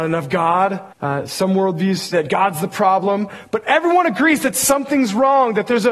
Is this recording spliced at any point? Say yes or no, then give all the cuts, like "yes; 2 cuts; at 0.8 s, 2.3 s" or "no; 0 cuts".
yes; 2 cuts; at 0.9 s, 2.1 s